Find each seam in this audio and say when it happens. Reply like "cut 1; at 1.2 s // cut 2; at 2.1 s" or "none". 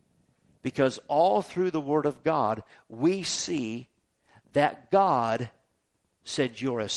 none